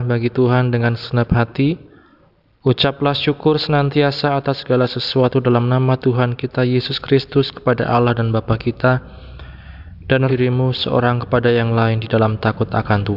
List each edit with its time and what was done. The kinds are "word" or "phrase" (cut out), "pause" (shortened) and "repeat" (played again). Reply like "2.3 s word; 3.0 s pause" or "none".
10.3 s word

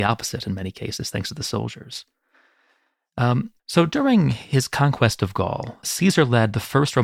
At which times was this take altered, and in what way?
3.6 s pause; 5.8 s word

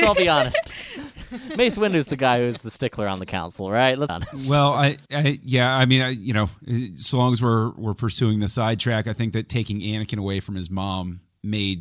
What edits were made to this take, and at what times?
4.1 s phrase; 5.1 s pause

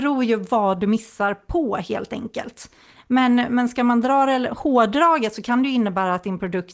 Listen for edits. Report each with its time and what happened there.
none

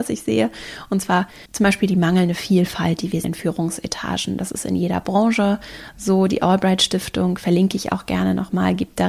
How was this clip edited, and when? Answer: 1.5 s pause; 3.2 s word

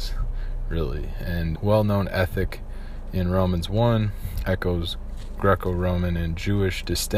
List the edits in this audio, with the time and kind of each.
1.6 s word

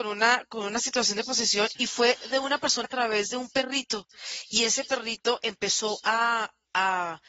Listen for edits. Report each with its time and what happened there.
1.8 s word; 2.8 s word

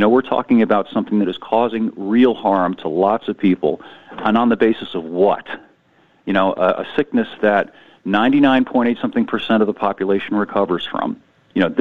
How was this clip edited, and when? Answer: none

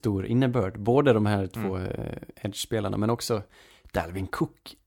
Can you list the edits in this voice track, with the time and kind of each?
none

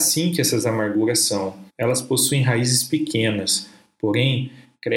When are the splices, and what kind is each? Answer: 1.7 s pause

